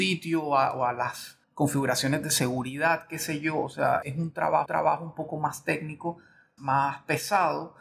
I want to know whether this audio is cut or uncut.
cut